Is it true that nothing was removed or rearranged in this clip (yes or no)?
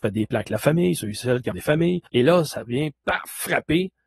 no